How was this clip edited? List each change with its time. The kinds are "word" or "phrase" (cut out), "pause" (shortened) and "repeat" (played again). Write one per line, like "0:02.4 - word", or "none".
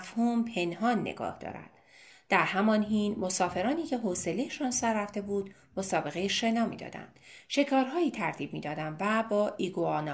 none